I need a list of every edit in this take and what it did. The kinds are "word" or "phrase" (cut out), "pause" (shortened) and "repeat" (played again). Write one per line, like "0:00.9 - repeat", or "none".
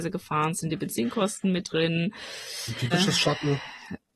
0:02.9 - word